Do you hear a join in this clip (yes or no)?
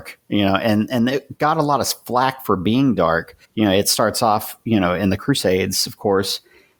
yes